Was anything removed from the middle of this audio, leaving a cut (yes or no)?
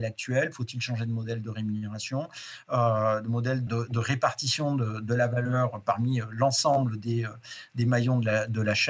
yes